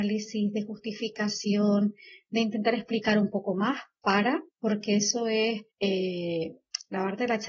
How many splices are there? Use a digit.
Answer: 2